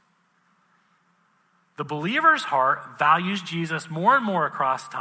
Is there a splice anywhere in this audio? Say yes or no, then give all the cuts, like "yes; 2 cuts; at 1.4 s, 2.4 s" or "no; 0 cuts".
no; 0 cuts